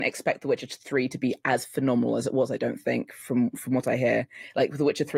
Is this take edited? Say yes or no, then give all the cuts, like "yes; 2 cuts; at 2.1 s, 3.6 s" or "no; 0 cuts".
no; 0 cuts